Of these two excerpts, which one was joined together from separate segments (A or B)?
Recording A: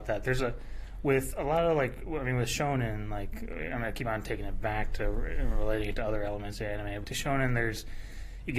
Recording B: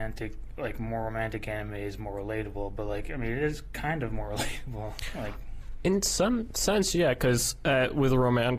A